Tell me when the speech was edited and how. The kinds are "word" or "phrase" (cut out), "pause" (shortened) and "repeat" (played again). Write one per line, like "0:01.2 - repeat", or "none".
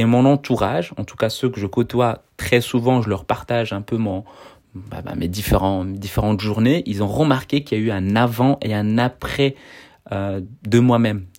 none